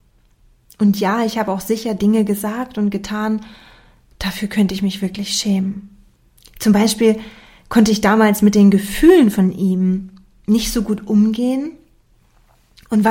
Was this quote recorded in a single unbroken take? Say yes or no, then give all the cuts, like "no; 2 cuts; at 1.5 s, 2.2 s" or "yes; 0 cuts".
yes; 0 cuts